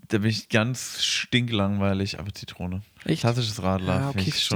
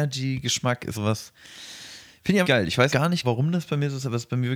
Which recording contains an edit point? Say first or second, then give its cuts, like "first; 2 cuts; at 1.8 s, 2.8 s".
second; 4 cuts; at 0.9 s, 2.4 s, 2.9 s, 3.2 s